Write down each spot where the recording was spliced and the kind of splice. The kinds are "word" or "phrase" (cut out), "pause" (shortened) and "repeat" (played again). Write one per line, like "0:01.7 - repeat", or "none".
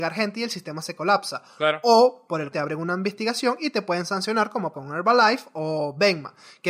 0:02.5 - word
0:04.7 - word